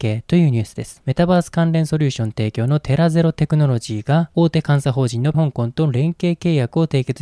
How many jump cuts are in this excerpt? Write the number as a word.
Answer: one